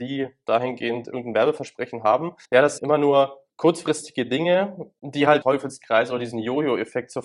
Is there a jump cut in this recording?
yes; 4 cuts; at 2.4 s, 2.8 s, 3.5 s, 5.4 s

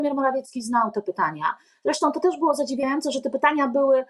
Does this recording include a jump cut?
no; 0 cuts

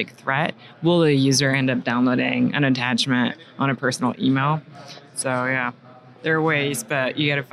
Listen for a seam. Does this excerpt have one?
no; 0 cuts

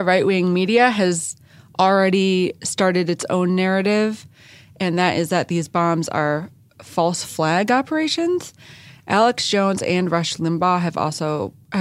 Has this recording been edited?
no; 0 cuts

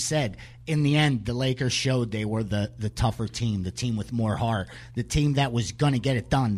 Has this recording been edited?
no; 0 cuts

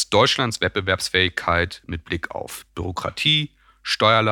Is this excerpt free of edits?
yes; 0 cuts

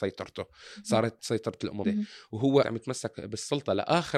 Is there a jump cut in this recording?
yes; 3 cuts; at 1.2 s, 1.8 s, 2.6 s

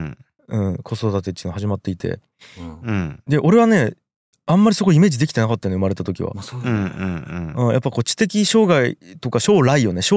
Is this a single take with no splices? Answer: yes; 0 cuts

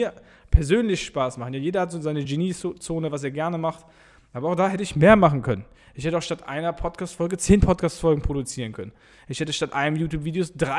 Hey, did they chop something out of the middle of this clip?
no; 0 cuts

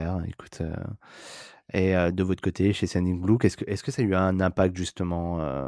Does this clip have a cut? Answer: no; 0 cuts

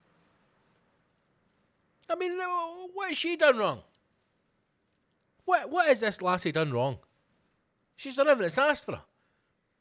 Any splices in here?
no; 0 cuts

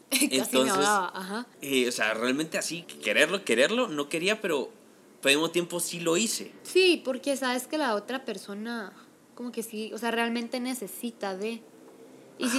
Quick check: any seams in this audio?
yes; 3 cuts; at 1.5 s, 2.8 s, 6.6 s

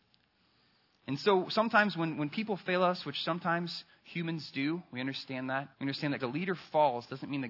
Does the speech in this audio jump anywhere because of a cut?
yes; 2 cuts; at 5.7 s, 6.2 s

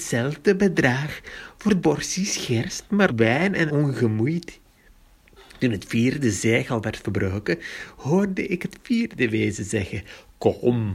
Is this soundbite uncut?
no; 3 cuts; at 1.8 s, 3.1 s, 3.7 s

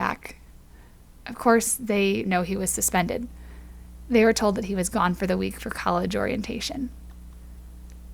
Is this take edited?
yes; 1 cut; at 2.2 s

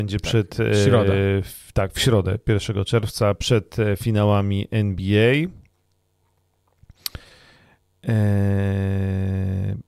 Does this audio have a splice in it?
no; 0 cuts

